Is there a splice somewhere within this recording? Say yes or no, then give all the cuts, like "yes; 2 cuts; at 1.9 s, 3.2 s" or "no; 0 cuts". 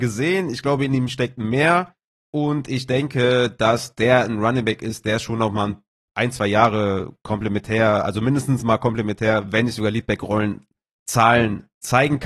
no; 0 cuts